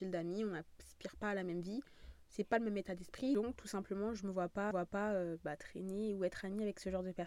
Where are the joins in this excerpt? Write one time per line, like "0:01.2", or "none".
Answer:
0:04.7

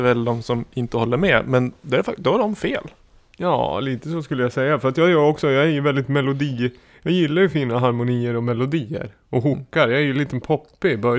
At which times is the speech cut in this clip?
none

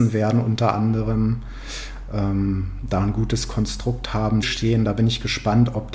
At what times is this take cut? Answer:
0:04.4

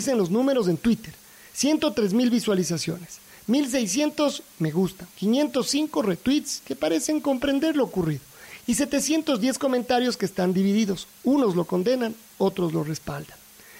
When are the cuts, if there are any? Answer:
none

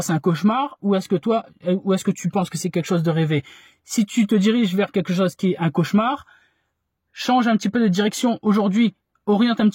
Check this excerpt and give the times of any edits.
none

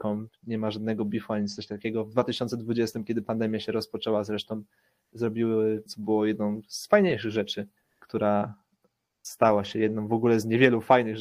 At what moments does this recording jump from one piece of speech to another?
0:05.9
0:07.8

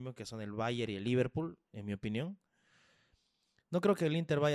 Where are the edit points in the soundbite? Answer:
none

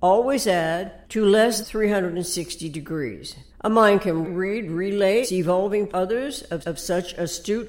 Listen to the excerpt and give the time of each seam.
0:01.0
0:01.6
0:03.5
0:04.2
0:05.2
0:05.9
0:06.6

